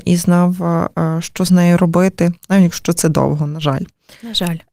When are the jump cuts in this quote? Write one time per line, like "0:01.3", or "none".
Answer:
none